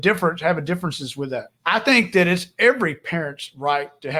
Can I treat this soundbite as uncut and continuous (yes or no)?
no